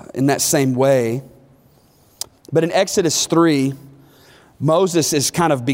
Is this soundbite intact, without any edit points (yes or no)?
yes